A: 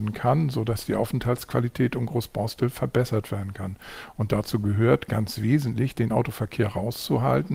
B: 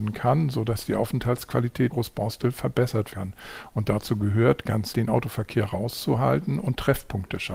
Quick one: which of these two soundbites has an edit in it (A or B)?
B